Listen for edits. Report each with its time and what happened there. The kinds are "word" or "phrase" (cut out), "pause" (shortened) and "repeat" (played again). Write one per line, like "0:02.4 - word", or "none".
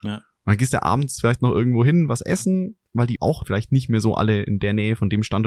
0:03.4 - word

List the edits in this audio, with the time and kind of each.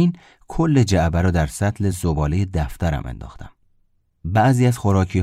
none

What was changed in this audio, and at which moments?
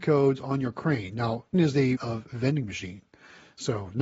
0:01.5 - word
0:02.0 - word

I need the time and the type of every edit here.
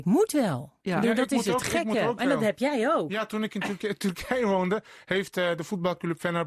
none

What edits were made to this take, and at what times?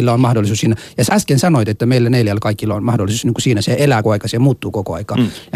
0:01.1 - word
0:04.0 - word

